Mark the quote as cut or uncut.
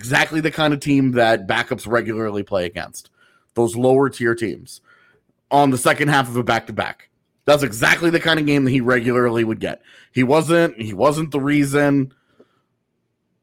uncut